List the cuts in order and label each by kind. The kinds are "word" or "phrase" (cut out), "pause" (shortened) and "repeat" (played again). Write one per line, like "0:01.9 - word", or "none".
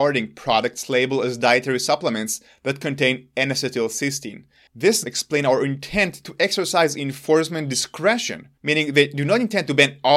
0:05.0 - word
0:08.6 - pause